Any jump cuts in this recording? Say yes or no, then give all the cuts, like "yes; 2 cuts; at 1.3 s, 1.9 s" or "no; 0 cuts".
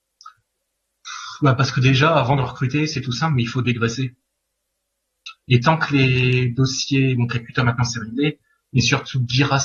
no; 0 cuts